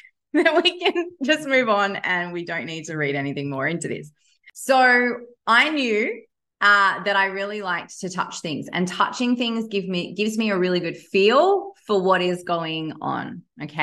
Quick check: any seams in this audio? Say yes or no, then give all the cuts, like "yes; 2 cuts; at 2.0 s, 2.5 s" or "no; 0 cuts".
no; 0 cuts